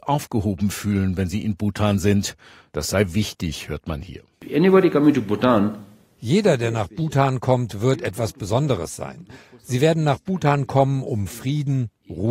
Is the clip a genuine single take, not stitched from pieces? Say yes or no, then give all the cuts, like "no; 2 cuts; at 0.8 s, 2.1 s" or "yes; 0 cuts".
yes; 0 cuts